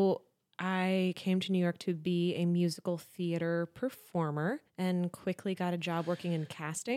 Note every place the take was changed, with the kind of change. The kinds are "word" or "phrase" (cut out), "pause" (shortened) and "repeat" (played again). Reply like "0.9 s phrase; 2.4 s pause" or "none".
4.7 s pause